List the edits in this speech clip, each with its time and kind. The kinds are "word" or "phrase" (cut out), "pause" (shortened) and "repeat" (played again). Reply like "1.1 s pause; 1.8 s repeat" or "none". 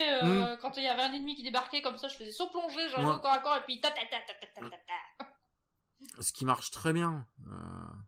none